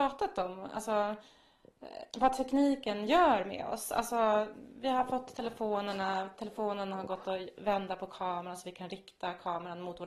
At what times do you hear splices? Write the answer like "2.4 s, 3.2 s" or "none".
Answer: 2.1 s